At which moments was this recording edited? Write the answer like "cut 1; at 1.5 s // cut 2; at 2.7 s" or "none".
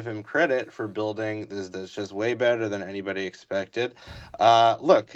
cut 1; at 1.7 s